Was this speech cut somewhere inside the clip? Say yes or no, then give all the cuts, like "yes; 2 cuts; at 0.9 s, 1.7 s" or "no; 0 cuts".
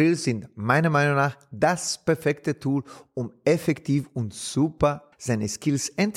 yes; 1 cut; at 5.1 s